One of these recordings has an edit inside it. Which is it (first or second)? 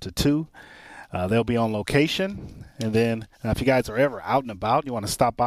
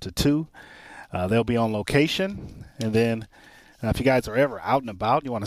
first